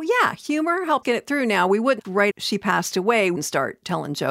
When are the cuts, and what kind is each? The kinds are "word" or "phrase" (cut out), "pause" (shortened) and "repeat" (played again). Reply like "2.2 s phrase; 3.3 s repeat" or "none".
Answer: 1.0 s word; 2.0 s word; 2.3 s word; 3.4 s word